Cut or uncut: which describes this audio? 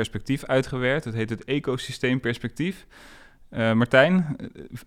uncut